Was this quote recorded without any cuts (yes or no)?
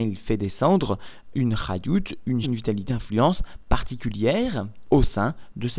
no